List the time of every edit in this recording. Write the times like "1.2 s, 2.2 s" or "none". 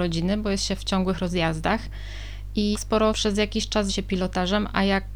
2.7 s, 3.1 s, 3.9 s